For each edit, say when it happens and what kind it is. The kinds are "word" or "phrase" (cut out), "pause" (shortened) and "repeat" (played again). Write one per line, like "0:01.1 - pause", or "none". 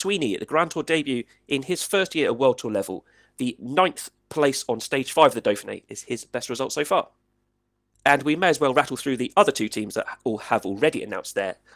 none